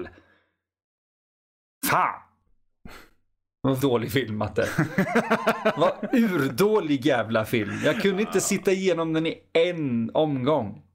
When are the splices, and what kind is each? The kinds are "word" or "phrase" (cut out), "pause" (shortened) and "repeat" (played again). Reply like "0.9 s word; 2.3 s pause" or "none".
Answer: 3.8 s word